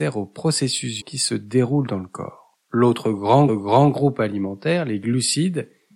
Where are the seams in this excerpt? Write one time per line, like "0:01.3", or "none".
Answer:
0:01.0
0:02.6
0:03.5